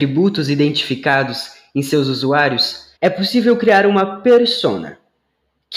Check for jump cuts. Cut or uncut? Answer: cut